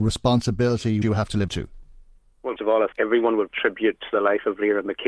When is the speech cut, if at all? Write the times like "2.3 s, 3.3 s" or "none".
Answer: 1.0 s, 1.5 s, 2.6 s, 2.9 s, 3.5 s